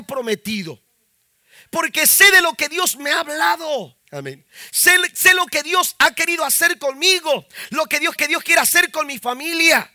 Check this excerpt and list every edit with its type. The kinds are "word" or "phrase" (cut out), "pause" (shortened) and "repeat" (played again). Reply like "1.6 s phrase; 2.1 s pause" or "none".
4.0 s pause; 8.2 s repeat